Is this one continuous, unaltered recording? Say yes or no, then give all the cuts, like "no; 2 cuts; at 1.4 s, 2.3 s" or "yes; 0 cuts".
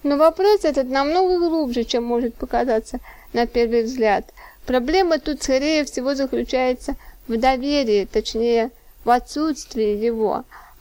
yes; 0 cuts